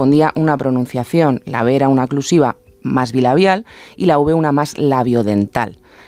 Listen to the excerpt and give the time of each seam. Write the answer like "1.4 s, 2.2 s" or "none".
none